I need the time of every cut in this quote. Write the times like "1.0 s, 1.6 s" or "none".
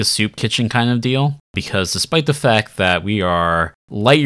none